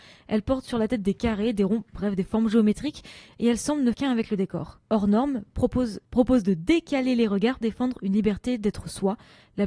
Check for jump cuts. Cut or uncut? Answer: cut